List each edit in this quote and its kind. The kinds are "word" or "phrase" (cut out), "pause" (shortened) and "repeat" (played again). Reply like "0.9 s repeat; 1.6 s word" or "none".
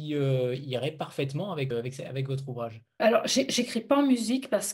1.7 s word; 3.0 s word